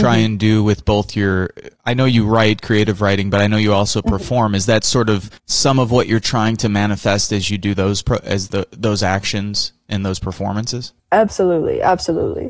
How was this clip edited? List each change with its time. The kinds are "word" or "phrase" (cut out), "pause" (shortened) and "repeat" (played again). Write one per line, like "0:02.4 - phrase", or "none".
0:01.8 - pause
0:05.4 - pause
0:11.0 - pause